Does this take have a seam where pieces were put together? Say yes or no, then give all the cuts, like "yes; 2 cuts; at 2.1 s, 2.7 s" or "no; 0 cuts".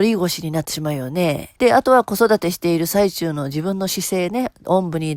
yes; 1 cut; at 1.6 s